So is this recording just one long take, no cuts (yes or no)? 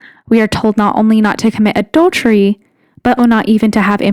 no